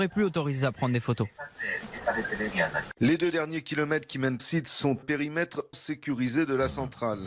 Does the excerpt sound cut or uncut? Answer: cut